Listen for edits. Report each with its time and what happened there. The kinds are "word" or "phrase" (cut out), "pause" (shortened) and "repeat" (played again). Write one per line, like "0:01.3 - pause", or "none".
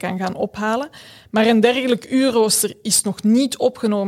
none